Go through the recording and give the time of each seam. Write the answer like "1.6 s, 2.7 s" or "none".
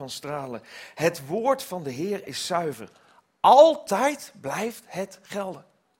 none